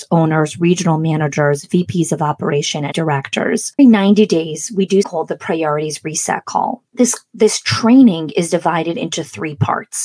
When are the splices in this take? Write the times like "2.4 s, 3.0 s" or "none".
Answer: 2.9 s, 3.8 s, 5.0 s, 6.9 s